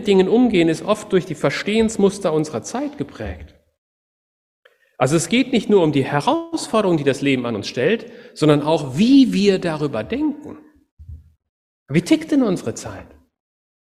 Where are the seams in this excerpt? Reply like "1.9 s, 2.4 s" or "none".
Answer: none